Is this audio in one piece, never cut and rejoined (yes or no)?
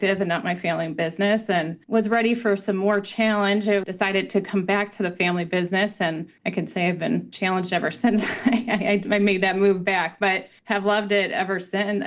yes